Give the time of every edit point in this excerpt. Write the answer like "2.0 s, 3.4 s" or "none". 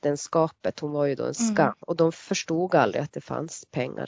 1.8 s